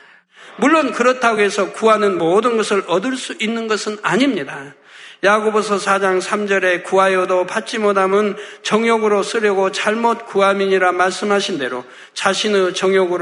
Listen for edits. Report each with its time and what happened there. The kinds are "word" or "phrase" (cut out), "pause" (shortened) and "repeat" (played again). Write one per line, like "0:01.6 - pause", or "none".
none